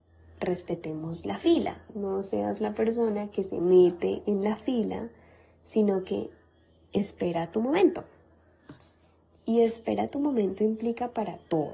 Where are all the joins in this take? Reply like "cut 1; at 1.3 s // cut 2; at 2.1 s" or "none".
none